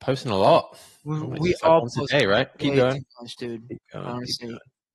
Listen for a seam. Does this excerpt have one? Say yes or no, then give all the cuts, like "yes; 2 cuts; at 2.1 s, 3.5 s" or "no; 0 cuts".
no; 0 cuts